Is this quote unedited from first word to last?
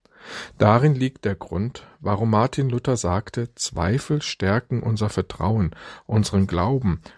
yes; 0 cuts

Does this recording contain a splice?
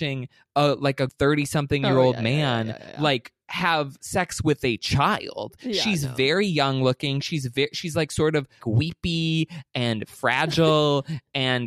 yes; 2 cuts; at 1.1 s, 8.6 s

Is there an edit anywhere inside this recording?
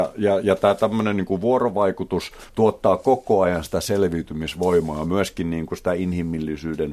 yes; 1 cut; at 2.5 s

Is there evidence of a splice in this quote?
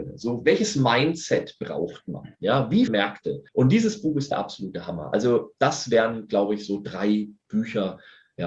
yes; 2 cuts; at 2.9 s, 3.5 s

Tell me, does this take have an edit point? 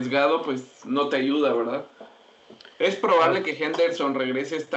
no; 0 cuts

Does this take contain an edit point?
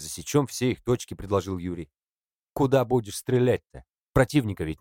no; 0 cuts

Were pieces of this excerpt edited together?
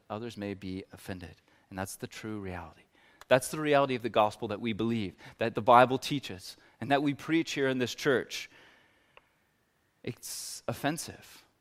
no; 0 cuts

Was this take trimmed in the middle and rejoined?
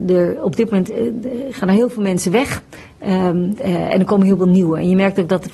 no; 0 cuts

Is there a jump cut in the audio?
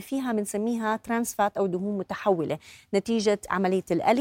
no; 0 cuts

